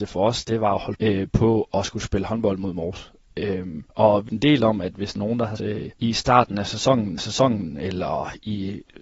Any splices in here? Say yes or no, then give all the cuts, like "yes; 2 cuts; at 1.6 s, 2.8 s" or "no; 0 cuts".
yes; 7 cuts; at 0.9 s, 3.9 s, 4.3 s, 5.2 s, 5.6 s, 6.0 s, 7.2 s